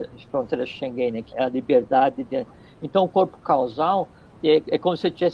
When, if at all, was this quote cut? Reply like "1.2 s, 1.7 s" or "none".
1.3 s